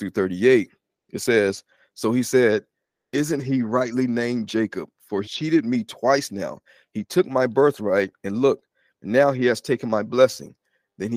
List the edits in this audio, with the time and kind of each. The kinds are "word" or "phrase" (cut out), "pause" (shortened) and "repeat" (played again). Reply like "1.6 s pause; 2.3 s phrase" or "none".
5.2 s phrase